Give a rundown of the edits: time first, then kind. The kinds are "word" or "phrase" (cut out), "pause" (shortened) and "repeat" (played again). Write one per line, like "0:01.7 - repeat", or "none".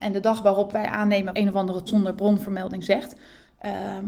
0:01.3 - word
0:01.9 - word